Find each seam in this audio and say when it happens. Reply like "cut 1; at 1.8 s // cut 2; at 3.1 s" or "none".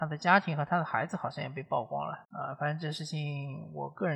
cut 1; at 2.2 s